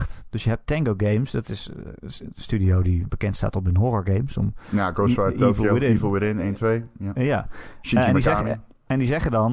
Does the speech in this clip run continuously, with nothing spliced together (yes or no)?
no